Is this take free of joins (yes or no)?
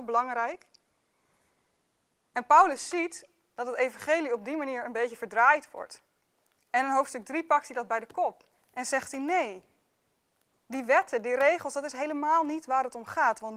yes